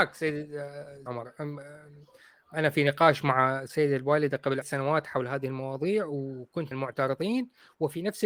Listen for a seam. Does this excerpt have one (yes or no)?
yes